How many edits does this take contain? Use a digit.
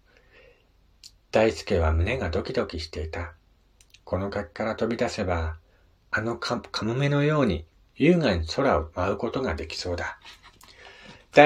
1